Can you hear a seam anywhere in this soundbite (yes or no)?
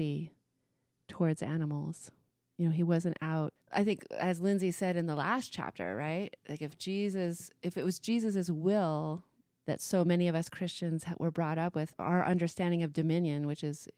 yes